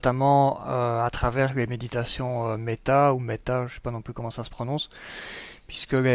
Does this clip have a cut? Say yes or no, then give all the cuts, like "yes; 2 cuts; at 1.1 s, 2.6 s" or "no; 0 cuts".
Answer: no; 0 cuts